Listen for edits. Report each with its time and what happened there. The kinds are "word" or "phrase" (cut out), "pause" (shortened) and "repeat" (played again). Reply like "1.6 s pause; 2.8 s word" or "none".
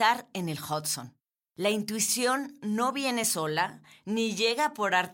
none